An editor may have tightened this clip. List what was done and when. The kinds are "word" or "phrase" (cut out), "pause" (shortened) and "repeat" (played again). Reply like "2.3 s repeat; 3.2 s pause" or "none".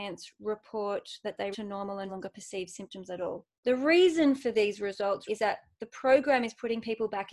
1.5 s word; 2.1 s word; 3.6 s pause; 5.3 s word